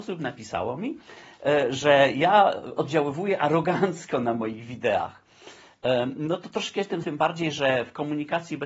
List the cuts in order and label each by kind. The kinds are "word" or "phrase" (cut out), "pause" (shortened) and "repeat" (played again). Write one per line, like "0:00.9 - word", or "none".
0:07.0 - word